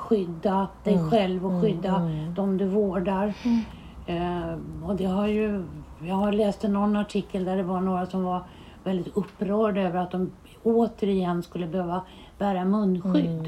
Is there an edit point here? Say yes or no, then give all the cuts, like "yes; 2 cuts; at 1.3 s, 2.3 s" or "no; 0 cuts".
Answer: no; 0 cuts